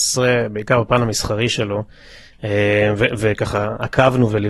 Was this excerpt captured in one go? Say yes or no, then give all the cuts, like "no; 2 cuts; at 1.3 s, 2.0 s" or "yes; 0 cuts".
yes; 0 cuts